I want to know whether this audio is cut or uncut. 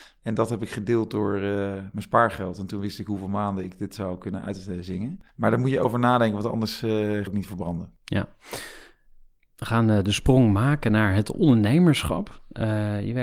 cut